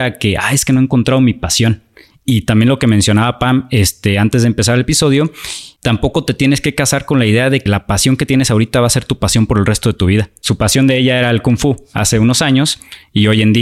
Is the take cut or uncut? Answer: cut